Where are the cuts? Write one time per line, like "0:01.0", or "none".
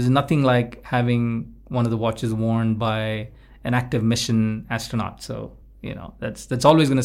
none